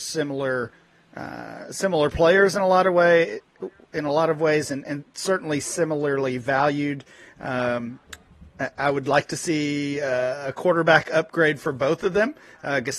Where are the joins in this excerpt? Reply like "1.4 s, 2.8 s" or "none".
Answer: none